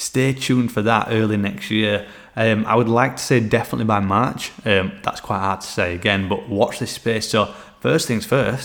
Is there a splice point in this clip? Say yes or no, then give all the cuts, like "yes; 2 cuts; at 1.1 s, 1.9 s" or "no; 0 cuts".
no; 0 cuts